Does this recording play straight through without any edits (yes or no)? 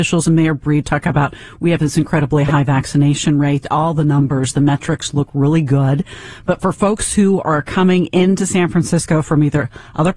yes